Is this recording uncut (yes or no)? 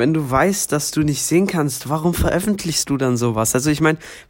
yes